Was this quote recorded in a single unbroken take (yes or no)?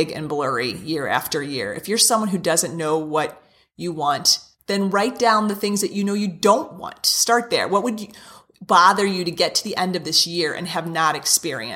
yes